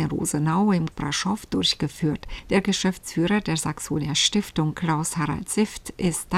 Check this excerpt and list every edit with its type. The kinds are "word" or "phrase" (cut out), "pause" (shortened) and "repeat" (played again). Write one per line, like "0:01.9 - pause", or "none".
0:00.9 - word